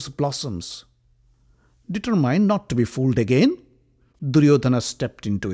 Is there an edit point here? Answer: no; 0 cuts

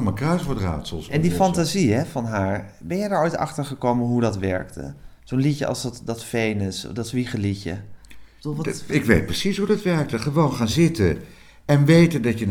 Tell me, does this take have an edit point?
no; 0 cuts

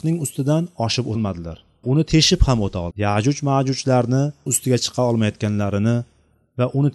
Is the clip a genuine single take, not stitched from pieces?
no; 4 cuts; at 1.1 s, 1.8 s, 2.9 s, 4.5 s

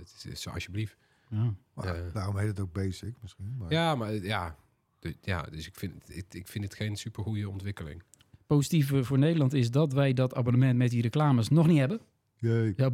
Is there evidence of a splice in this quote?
no; 0 cuts

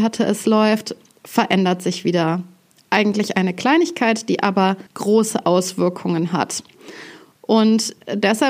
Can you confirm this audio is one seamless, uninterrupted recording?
no; 1 cut; at 4.9 s

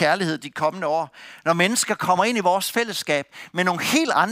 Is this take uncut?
yes; 0 cuts

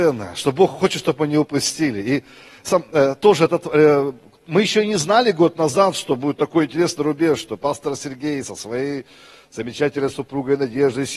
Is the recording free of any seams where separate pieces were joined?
yes; 0 cuts

